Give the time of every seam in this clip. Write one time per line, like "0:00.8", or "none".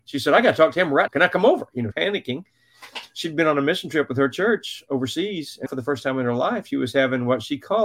0:01.1
0:01.9
0:05.7